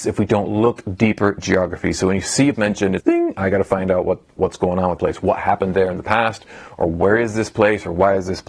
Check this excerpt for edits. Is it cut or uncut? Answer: cut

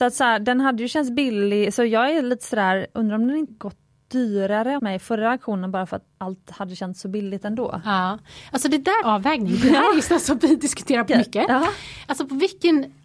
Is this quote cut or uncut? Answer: cut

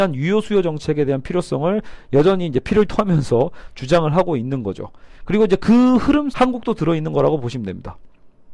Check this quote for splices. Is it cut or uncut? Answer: cut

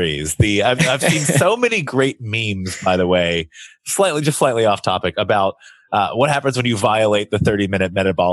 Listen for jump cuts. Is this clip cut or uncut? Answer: uncut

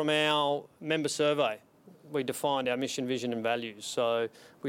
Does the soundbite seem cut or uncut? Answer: uncut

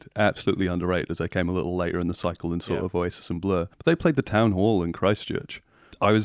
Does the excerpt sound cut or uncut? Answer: cut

